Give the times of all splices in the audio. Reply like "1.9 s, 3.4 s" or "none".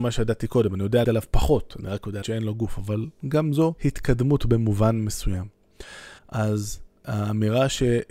1.0 s, 2.2 s, 3.8 s, 6.2 s